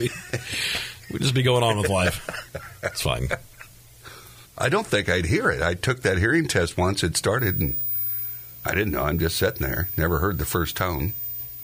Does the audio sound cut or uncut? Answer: cut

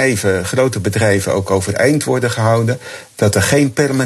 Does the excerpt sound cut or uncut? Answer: uncut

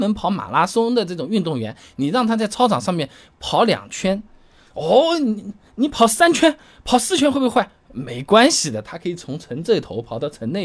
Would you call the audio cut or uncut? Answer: uncut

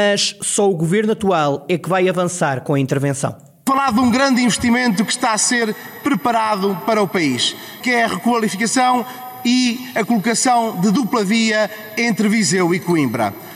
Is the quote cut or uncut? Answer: uncut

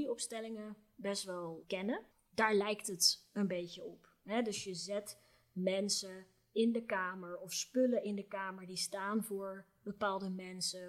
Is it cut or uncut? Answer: cut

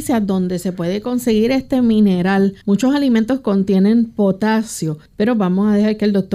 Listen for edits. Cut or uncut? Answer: cut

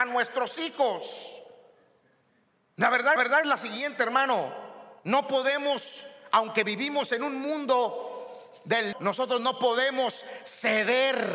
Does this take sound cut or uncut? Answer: cut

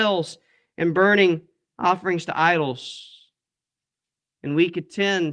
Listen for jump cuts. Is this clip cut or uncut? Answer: uncut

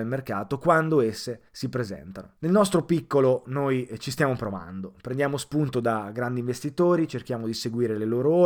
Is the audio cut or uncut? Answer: cut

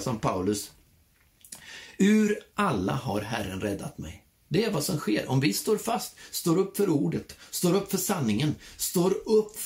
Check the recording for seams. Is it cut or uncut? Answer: uncut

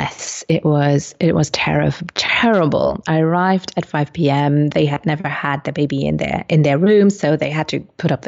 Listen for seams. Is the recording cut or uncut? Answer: uncut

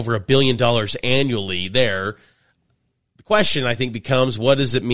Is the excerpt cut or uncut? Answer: uncut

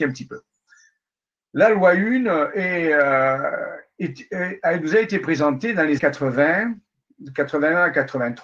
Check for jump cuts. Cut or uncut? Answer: cut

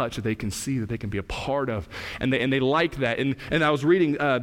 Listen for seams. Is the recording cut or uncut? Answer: uncut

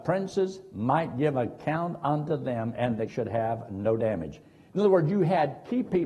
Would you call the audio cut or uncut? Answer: cut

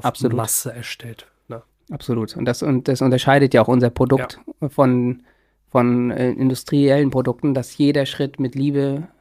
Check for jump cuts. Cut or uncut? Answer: uncut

